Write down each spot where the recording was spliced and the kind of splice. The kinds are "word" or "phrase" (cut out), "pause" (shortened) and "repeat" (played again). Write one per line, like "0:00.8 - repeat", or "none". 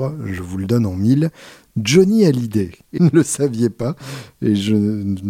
0:03.0 - phrase